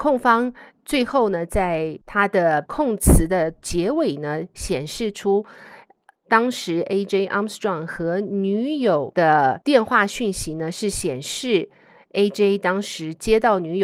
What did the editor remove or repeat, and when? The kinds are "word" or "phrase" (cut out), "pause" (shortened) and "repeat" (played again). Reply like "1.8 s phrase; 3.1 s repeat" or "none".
none